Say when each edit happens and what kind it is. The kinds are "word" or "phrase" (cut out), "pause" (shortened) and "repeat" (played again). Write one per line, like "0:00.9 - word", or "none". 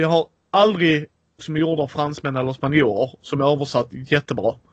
0:01.4 - phrase